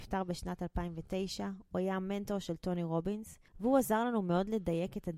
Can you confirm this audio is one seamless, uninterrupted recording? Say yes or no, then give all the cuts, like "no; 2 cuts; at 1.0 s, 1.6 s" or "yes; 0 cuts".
no; 1 cut; at 3.5 s